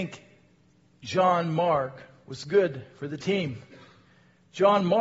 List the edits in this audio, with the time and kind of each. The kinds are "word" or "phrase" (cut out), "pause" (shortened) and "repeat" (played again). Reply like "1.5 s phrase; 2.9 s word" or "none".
none